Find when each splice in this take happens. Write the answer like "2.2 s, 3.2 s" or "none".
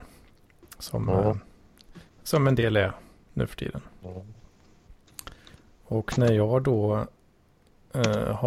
none

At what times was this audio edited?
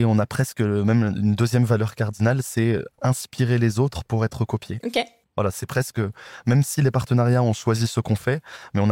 none

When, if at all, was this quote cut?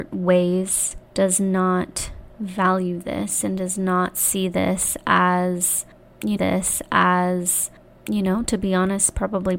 1.0 s, 6.4 s

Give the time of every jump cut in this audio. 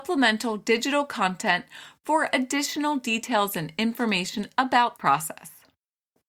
5.0 s

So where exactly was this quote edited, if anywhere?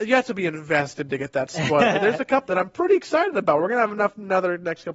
2.5 s

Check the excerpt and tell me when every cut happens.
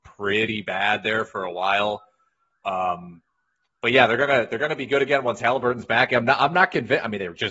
none

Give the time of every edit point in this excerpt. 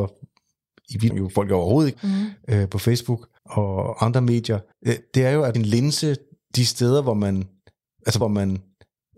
1.1 s, 1.9 s, 3.4 s, 4.7 s, 5.5 s, 8.2 s

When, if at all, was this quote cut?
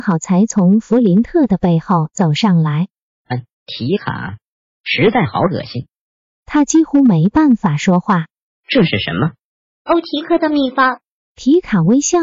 3.5 s

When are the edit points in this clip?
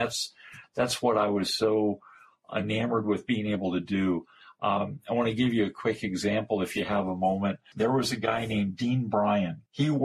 none

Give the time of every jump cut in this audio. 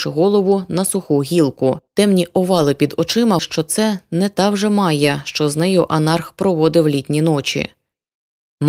1.9 s, 3.4 s

